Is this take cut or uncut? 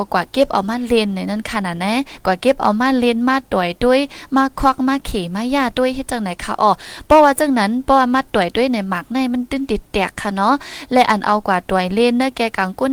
uncut